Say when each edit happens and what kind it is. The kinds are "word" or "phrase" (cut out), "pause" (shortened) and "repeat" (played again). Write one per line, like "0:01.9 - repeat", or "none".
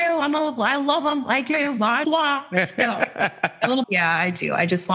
0:02.0 - word
0:03.8 - word